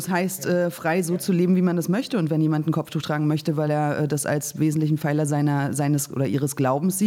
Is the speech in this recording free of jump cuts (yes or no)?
yes